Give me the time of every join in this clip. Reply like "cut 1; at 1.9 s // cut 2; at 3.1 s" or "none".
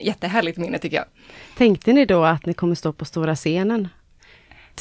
none